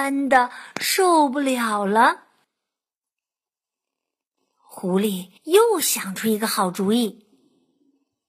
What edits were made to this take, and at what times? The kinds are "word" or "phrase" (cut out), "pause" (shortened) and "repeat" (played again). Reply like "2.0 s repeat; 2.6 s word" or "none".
5.4 s pause